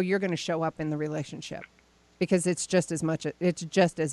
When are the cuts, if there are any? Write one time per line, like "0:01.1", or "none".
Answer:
none